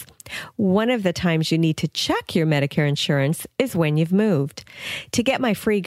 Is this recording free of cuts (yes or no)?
yes